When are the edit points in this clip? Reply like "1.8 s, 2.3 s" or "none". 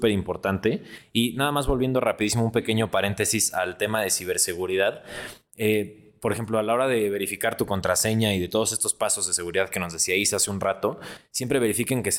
none

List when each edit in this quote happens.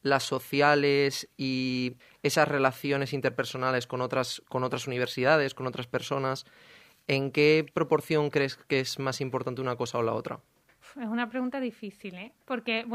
none

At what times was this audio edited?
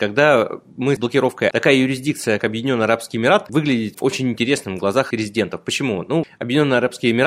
1.0 s, 1.5 s, 2.4 s, 3.5 s, 3.9 s, 5.1 s, 6.2 s

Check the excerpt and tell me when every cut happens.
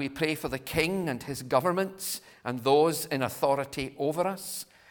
none

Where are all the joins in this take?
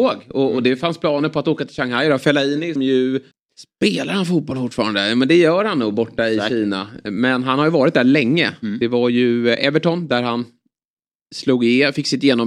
2.8 s, 3.3 s

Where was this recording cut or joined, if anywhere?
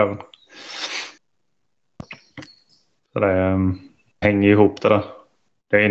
2.7 s, 4.2 s

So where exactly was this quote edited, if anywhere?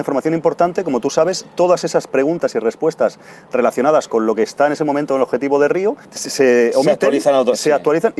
6.0 s

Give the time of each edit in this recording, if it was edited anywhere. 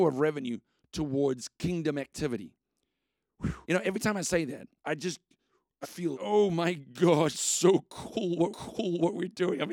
3.6 s, 4.8 s, 5.8 s, 6.1 s, 7.3 s, 8.5 s

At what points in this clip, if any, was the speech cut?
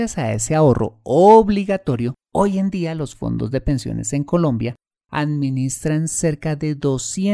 2.2 s

